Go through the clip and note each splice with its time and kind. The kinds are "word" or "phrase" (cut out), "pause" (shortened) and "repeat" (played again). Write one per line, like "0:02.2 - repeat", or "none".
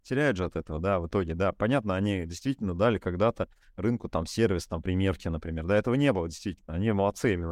none